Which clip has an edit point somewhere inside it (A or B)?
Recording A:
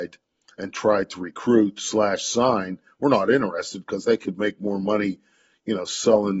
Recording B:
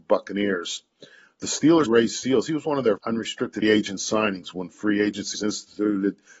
B